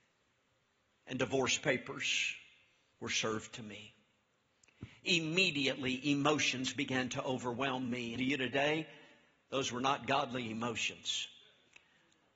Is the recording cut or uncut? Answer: cut